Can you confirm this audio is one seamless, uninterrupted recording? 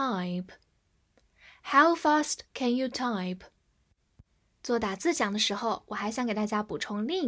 yes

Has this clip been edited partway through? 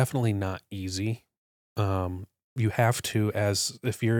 no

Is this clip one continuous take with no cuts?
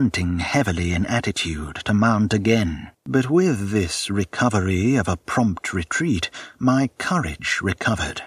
no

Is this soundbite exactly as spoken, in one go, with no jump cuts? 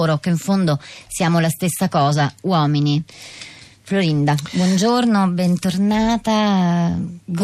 yes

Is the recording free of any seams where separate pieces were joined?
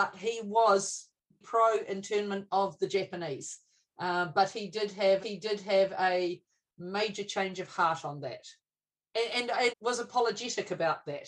no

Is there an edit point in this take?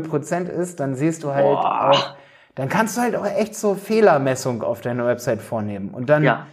no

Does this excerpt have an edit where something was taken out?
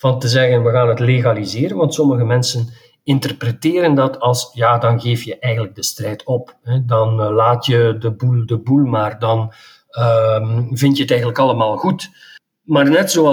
no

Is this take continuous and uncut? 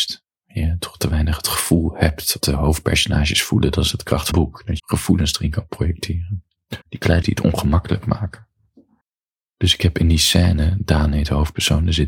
no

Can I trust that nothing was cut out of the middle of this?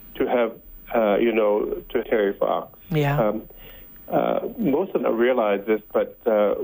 no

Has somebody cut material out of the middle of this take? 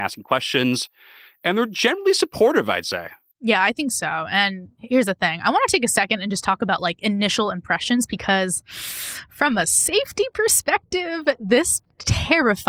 no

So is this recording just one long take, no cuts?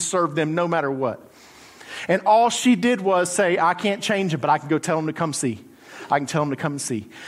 yes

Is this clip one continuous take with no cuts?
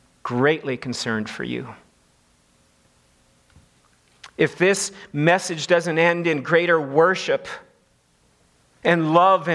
yes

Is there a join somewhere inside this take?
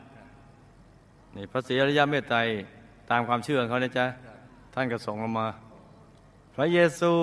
no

